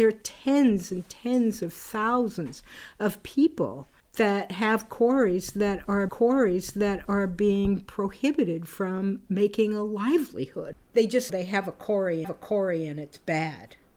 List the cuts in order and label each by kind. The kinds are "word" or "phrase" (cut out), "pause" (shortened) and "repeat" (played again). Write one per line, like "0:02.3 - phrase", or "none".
0:04.0 - pause
0:06.1 - repeat
0:10.8 - pause
0:11.3 - word
0:12.2 - repeat